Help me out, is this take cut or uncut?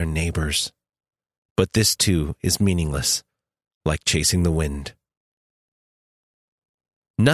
uncut